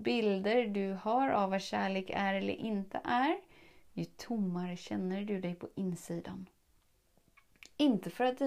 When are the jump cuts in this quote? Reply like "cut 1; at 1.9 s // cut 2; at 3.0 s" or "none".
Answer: none